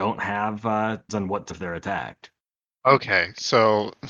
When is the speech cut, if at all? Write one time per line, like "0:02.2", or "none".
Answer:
0:01.1
0:01.5
0:02.5